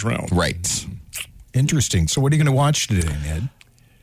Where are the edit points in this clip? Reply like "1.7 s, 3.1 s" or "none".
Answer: none